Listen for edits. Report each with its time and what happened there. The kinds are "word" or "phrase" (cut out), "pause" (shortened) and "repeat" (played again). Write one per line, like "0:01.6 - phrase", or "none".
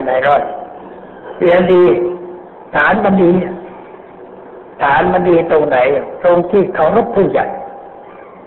0:02.7 - pause